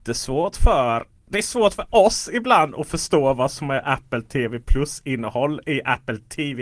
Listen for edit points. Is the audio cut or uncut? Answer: uncut